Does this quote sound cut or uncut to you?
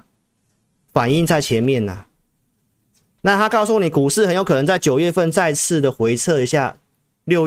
uncut